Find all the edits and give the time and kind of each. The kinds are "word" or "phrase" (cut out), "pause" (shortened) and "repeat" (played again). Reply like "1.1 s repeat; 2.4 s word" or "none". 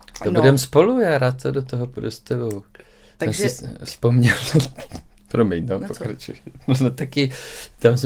none